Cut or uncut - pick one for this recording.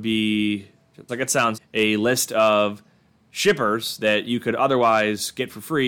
cut